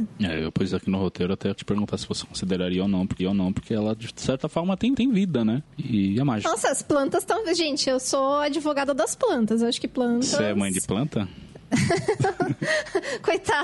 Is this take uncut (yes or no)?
no